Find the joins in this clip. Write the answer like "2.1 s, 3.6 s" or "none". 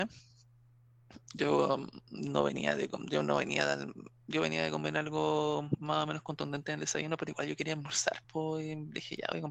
none